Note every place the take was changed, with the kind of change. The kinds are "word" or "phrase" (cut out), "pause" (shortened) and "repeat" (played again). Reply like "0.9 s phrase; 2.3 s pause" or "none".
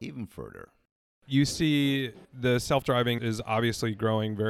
2.2 s pause; 3.2 s word